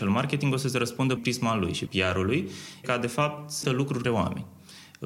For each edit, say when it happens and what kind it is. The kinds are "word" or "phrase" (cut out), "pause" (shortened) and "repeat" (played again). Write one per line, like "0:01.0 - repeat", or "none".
0:01.2 - word
0:01.9 - word
0:02.8 - word
0:03.6 - word
0:04.0 - word